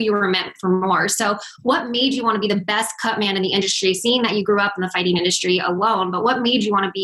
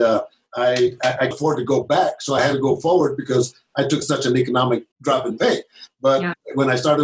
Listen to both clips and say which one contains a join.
second; 2 cuts; at 1.3 s, 4.9 s

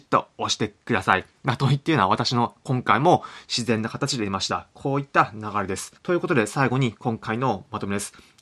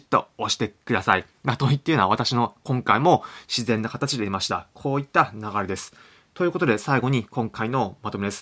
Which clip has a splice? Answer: first; 1 cut; at 6.0 s

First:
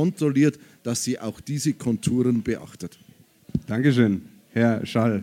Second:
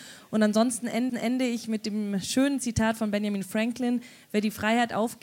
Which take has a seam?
second; 1 cut; at 1.1 s

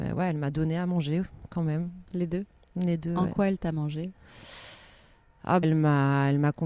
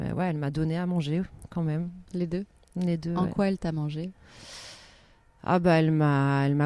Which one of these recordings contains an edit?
first; 1 cut; at 5.6 s

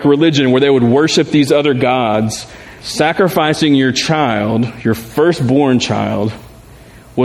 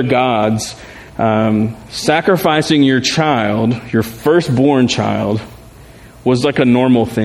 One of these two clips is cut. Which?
first; 1 cut; at 2.8 s

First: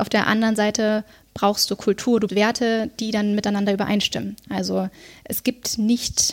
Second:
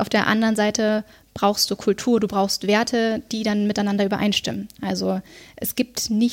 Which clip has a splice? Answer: first; 1 cut; at 2.3 s

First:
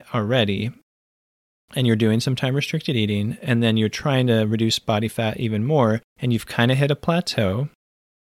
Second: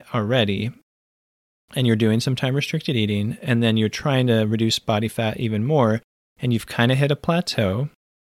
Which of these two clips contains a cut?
first; 1 cut; at 6.1 s

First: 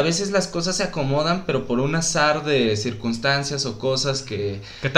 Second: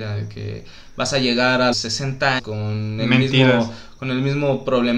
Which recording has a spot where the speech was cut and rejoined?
second; 2 cuts; at 1.7 s, 2.4 s

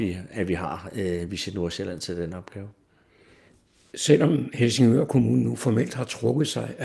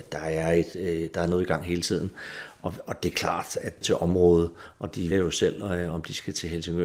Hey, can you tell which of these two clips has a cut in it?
second; 2 cuts; at 3.8 s, 5.1 s

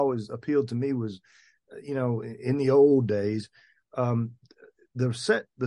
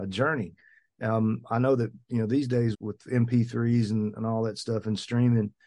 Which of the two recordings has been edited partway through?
second; 1 cut; at 2.7 s

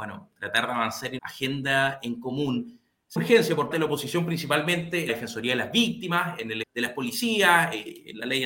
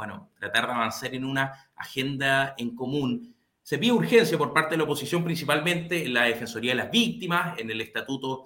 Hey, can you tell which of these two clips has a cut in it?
first; 5 cuts; at 1.2 s, 3.2 s, 3.7 s, 5.1 s, 6.6 s

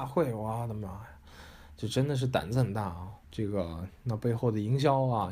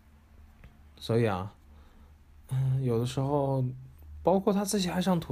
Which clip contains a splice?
first; 1 cut; at 3.2 s

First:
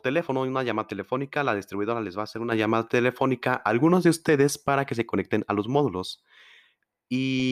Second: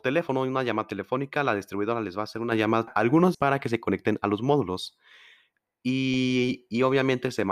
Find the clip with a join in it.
second; 2 cuts; at 2.9 s, 3.3 s

